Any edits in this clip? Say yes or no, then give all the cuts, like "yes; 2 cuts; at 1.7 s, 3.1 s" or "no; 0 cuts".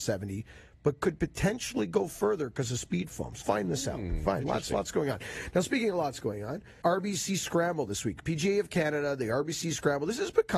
yes; 2 cuts; at 3.4 s, 6.8 s